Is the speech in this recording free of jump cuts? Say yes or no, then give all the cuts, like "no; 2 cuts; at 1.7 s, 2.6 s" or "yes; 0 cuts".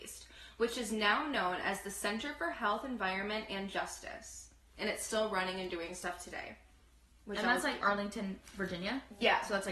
yes; 0 cuts